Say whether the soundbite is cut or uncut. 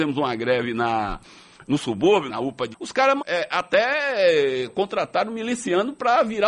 cut